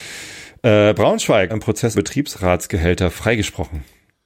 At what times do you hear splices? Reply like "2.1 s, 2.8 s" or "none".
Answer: 1.5 s, 1.9 s